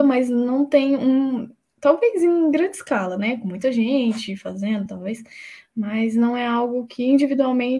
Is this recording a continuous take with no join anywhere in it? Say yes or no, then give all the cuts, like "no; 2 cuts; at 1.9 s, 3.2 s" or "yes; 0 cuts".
yes; 0 cuts